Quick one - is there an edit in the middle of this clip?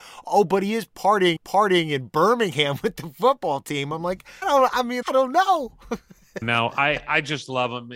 yes; 4 cuts; at 1.4 s, 4.4 s, 5.0 s, 6.4 s

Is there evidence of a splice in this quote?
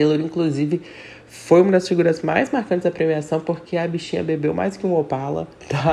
no; 0 cuts

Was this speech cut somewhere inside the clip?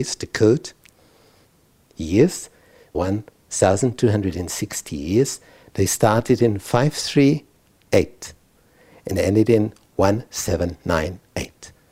yes; 1 cut; at 2.9 s

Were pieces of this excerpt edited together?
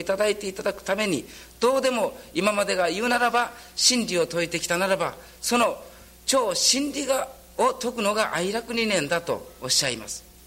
no; 0 cuts

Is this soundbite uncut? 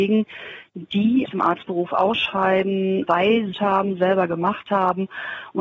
no; 2 cuts; at 1.3 s, 3.5 s

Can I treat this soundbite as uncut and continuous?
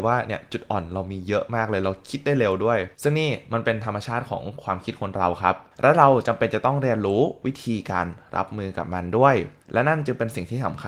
no; 3 cuts; at 2.9 s, 5.7 s, 9.6 s

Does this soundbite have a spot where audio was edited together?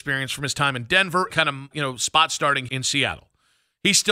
yes; 3 cuts; at 1.3 s, 1.7 s, 2.7 s

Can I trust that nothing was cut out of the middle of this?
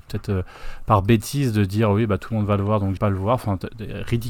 no; 1 cut; at 3.0 s

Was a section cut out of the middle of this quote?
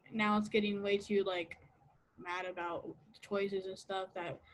yes; 1 cut; at 2.1 s

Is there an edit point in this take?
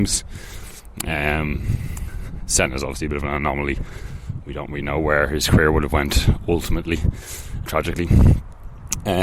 yes; 1 cut; at 7.7 s

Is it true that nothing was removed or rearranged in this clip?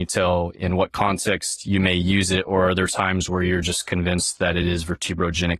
yes; 0 cuts

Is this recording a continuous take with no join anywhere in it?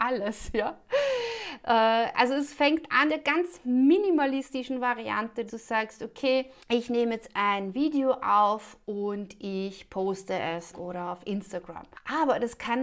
no; 4 cuts; at 3.1 s, 5.5 s, 6.6 s, 10.7 s

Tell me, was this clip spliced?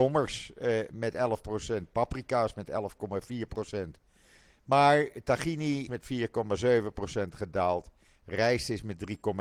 yes; 1 cut; at 5.9 s

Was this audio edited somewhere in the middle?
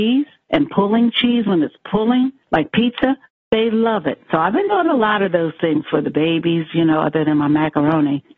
no; 0 cuts

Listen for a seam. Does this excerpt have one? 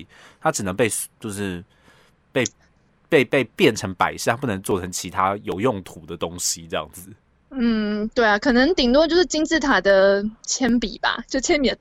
no; 0 cuts

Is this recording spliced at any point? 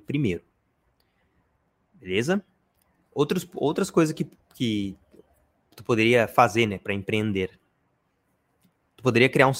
no; 0 cuts

